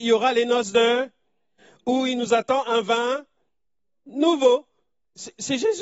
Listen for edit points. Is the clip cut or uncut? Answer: uncut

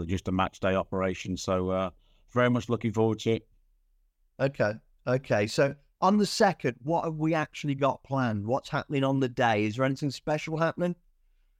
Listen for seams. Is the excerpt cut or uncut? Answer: uncut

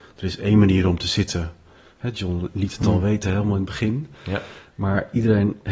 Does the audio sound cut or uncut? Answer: uncut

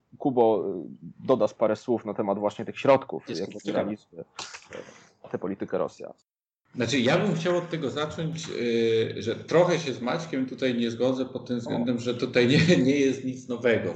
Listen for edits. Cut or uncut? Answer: uncut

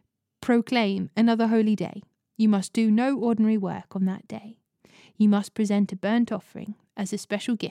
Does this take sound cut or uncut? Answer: uncut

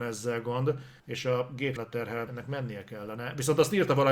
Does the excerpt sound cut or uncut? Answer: cut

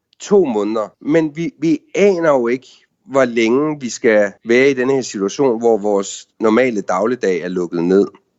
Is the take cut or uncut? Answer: cut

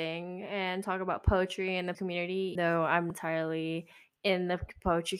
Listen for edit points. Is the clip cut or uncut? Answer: cut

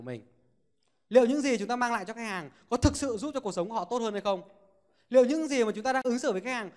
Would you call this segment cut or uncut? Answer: uncut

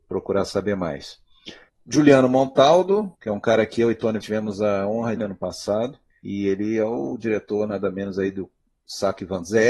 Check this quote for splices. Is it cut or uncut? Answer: cut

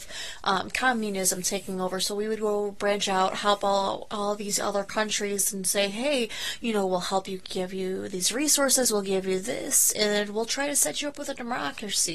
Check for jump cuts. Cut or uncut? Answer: uncut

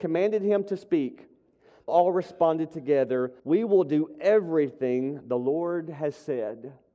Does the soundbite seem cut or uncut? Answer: cut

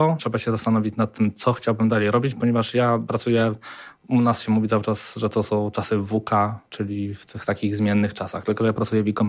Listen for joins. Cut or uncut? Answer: cut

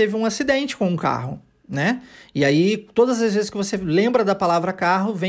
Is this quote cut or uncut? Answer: uncut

